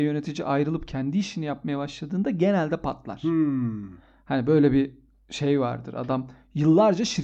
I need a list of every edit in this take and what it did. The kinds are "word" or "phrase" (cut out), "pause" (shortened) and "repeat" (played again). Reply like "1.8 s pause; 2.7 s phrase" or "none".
none